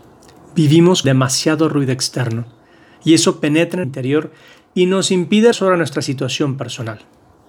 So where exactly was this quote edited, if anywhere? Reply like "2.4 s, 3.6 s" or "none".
1.0 s, 3.8 s, 5.5 s